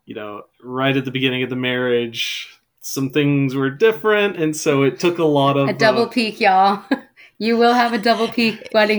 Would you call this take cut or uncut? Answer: cut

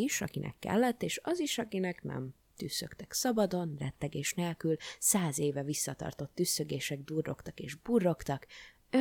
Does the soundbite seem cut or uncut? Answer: uncut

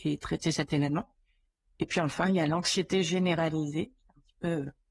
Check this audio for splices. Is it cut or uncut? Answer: uncut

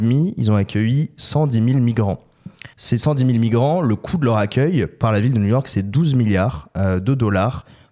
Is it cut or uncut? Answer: cut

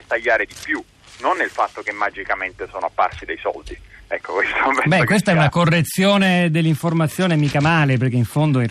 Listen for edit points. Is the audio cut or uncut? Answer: uncut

